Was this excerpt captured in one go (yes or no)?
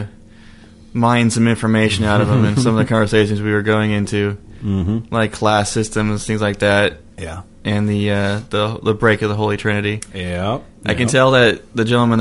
no